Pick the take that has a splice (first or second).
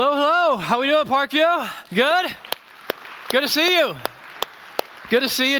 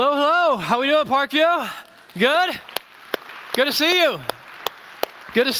first